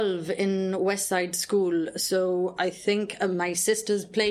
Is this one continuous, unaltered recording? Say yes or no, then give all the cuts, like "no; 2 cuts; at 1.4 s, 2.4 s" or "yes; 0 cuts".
yes; 0 cuts